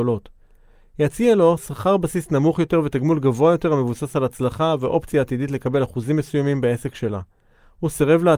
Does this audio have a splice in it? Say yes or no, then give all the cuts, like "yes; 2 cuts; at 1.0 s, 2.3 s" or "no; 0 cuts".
no; 0 cuts